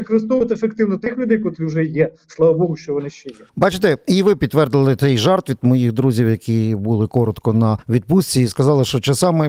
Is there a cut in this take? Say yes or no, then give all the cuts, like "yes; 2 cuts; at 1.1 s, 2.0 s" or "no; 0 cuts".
yes; 2 cuts; at 3.5 s, 7.8 s